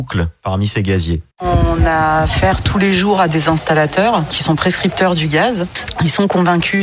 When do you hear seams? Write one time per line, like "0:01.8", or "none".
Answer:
none